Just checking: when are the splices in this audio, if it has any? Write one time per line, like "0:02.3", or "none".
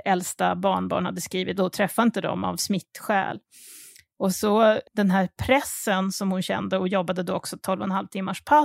0:01.6